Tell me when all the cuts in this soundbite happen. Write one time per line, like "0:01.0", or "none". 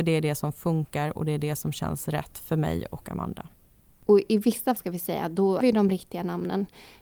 0:04.8
0:05.6